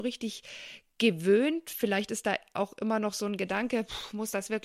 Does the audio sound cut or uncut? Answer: uncut